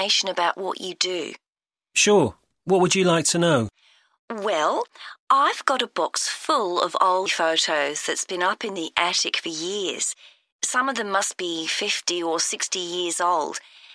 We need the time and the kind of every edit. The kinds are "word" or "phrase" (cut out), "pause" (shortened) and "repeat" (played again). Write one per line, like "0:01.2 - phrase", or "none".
0:07.3 - word